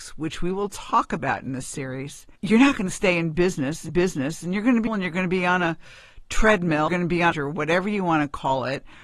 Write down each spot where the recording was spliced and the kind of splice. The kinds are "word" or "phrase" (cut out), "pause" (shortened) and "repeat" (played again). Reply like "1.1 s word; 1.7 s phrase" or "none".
2.4 s pause; 3.9 s repeat; 4.9 s word; 6.9 s phrase; 7.3 s phrase